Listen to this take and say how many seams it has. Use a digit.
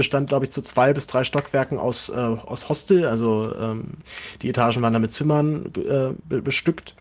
0